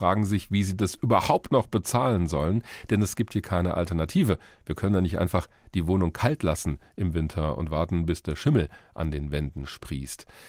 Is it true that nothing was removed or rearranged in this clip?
yes; 0 cuts

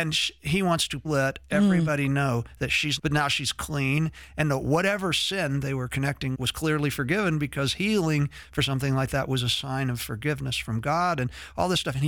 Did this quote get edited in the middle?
yes; 3 cuts; at 1.0 s, 3.0 s, 6.3 s

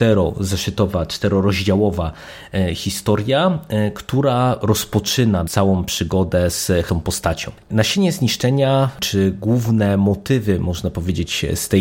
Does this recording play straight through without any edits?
no; 2 cuts; at 5.4 s, 6.9 s

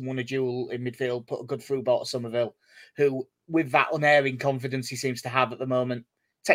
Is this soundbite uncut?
yes; 0 cuts

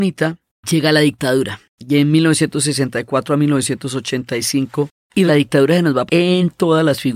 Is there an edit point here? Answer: yes; 2 cuts; at 5.3 s, 6.1 s

